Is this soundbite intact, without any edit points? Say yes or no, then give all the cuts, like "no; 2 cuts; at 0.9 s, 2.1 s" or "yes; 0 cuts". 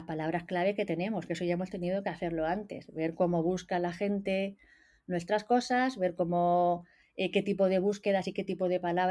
yes; 0 cuts